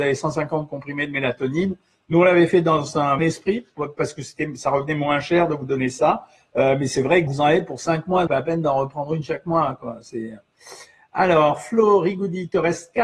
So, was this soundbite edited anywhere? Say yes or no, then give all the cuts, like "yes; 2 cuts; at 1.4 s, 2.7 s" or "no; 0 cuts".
yes; 3 cuts; at 3.2 s, 7.3 s, 8.3 s